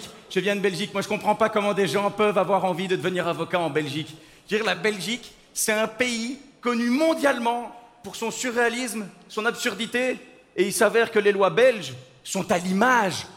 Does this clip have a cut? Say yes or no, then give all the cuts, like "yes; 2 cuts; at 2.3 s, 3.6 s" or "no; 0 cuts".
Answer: no; 0 cuts